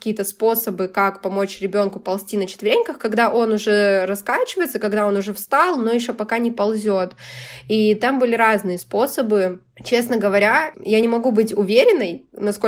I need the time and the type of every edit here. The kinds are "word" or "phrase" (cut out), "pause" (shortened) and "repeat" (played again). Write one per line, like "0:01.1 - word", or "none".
none